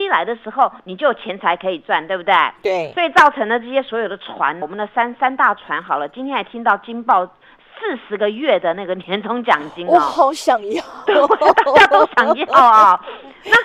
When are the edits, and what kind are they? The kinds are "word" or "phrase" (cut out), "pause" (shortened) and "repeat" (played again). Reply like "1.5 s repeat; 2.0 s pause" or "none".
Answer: 4.6 s word; 11.1 s word